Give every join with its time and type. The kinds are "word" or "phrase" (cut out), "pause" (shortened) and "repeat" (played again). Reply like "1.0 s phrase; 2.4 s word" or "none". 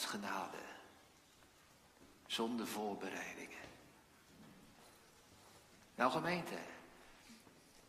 none